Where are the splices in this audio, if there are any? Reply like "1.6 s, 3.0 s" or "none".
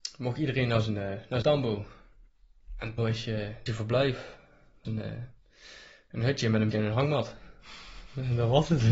1.4 s, 3.0 s, 3.7 s, 4.8 s, 6.7 s